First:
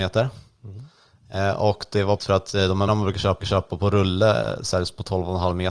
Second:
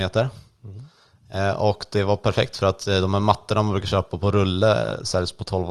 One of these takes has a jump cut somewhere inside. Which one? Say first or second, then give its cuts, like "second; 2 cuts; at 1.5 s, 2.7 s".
first; 3 cuts; at 2.2 s, 2.9 s, 3.4 s